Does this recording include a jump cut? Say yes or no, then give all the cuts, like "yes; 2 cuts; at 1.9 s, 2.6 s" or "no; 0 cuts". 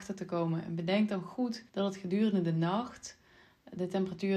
yes; 1 cut; at 1.7 s